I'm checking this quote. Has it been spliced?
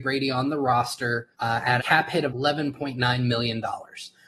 yes; 3 cuts; at 1.3 s, 1.8 s, 2.3 s

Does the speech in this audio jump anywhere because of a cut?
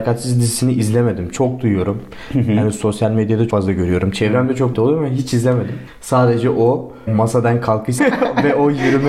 yes; 4 cuts; at 3.5 s, 4.7 s, 7.1 s, 8.0 s

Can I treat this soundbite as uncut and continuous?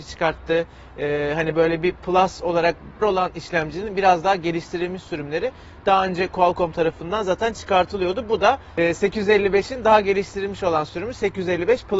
no; 1 cut; at 3.0 s

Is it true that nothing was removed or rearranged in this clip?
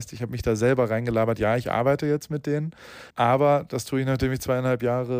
no; 1 cut; at 3.1 s

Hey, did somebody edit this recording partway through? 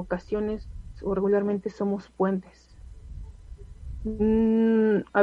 no; 0 cuts

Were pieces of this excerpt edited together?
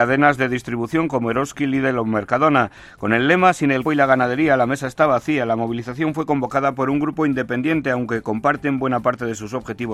yes; 1 cut; at 3.8 s

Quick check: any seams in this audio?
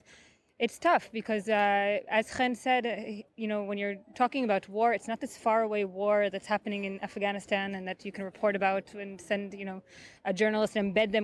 yes; 1 cut; at 3.3 s

